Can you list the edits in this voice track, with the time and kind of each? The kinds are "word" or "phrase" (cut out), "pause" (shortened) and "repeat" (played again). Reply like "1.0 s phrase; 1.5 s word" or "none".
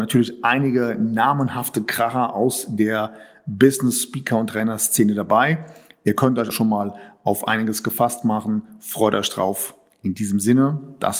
6.5 s word